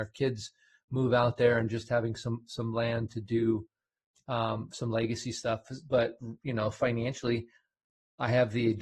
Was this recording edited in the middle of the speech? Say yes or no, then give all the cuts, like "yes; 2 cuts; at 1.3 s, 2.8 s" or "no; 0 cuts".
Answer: no; 0 cuts